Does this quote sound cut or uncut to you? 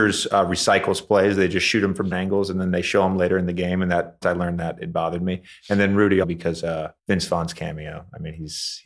cut